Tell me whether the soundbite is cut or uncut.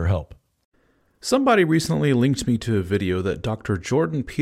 uncut